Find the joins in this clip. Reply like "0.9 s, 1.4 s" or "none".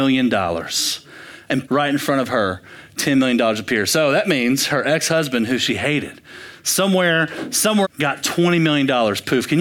1.7 s, 7.8 s